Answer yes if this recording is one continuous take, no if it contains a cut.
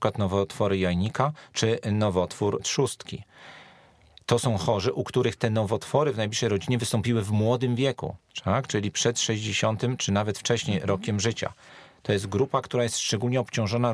yes